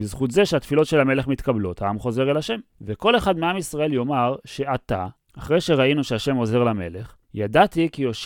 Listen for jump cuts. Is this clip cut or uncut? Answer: cut